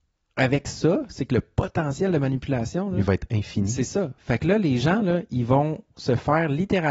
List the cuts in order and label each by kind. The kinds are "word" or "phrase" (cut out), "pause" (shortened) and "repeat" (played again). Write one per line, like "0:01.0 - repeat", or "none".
none

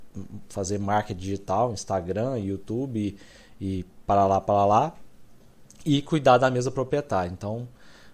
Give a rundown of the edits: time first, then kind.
none

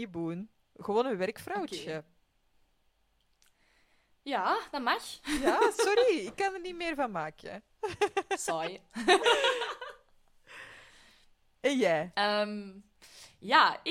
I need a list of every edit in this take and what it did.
none

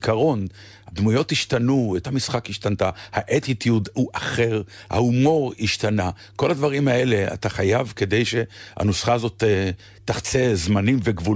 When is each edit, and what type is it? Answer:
0:02.0 - word
0:04.9 - word

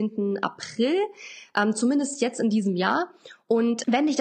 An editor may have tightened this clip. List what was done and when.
none

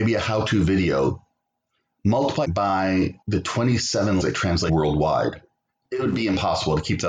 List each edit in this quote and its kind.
0:02.4 - word
0:03.2 - pause
0:04.2 - word
0:04.7 - word

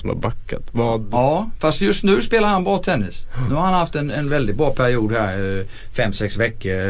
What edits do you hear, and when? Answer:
none

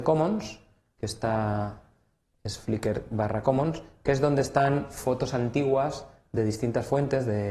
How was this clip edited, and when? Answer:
none

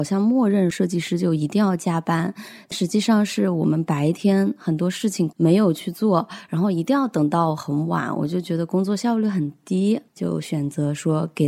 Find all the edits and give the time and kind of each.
0:10.1 - pause

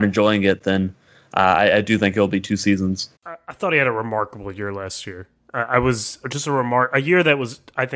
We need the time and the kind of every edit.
0:03.2 - pause

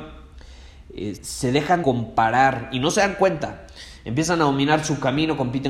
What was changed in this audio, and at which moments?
0:01.2 - word
0:01.8 - word

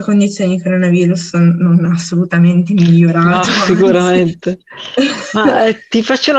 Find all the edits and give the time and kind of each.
none

